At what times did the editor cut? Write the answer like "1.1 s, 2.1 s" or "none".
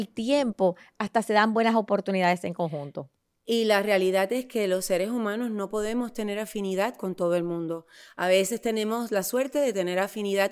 none